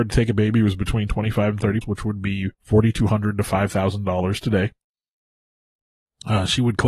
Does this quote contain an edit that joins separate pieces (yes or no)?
yes